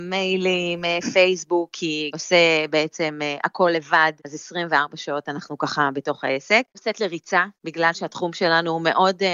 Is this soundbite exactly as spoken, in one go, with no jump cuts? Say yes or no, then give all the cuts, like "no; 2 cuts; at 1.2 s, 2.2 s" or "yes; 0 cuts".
no; 4 cuts; at 2.1 s, 4.2 s, 6.7 s, 7.6 s